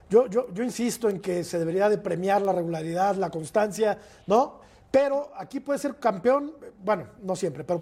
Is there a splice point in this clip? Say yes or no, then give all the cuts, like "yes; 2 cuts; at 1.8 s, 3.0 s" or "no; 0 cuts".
no; 0 cuts